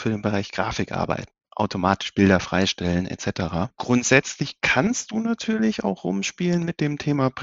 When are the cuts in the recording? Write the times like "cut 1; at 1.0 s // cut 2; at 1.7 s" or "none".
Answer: none